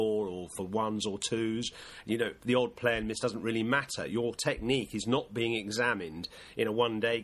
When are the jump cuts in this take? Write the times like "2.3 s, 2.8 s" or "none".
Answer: none